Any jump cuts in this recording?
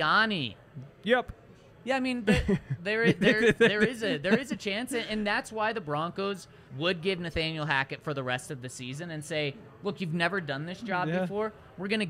yes; 2 cuts; at 1.7 s, 6.7 s

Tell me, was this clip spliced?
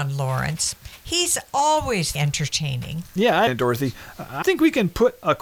yes; 3 cuts; at 2.2 s, 3.5 s, 4.4 s

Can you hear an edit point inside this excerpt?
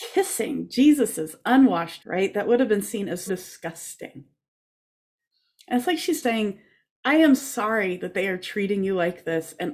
yes; 4 cuts; at 2.0 s, 3.3 s, 6.2 s, 7.4 s

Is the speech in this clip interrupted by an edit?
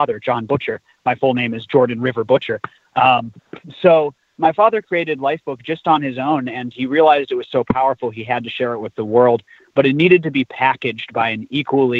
no; 0 cuts

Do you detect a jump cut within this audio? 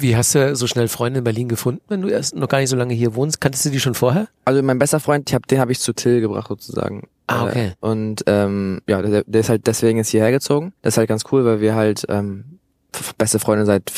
yes; 2 cuts; at 8.8 s, 10.8 s

